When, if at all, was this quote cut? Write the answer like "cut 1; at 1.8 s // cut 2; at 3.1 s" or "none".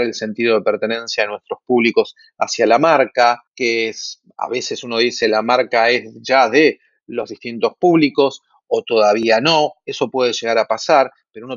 cut 1; at 3.5 s